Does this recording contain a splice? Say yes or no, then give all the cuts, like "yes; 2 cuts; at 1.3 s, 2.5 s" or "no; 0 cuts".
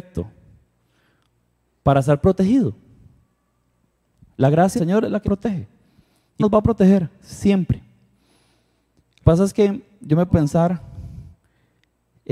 yes; 5 cuts; at 4.8 s, 5.2 s, 6.4 s, 9.2 s, 10.3 s